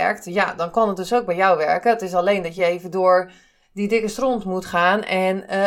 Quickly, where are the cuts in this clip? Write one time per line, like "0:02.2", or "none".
none

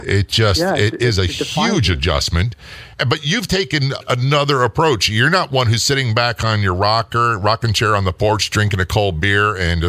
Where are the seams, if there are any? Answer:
0:02.9

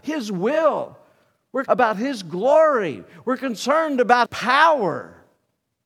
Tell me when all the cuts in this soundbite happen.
0:01.7
0:04.3

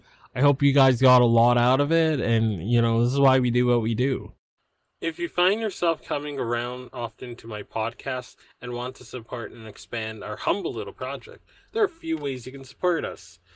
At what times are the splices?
none

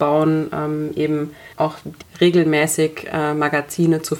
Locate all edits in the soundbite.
0:01.5
0:02.0

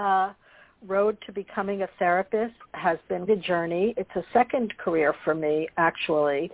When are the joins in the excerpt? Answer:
0:02.6
0:03.3

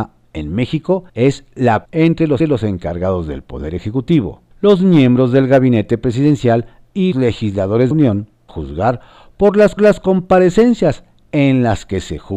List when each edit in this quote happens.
0:01.1
0:01.8
0:02.4
0:04.5
0:07.1
0:07.9
0:08.5
0:09.8

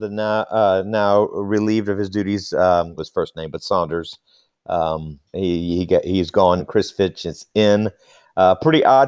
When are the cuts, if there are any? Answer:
0:03.0
0:05.3
0:06.6

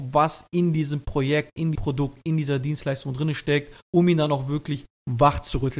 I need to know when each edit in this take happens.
0:01.7
0:03.8

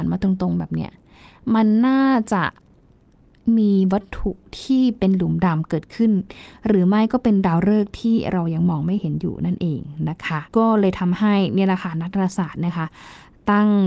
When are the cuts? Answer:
0:10.5

